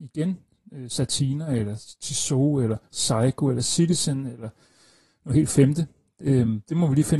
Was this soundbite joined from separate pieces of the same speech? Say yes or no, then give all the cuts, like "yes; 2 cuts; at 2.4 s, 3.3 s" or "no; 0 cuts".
no; 0 cuts